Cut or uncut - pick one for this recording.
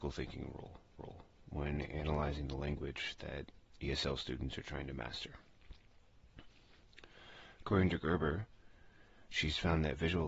cut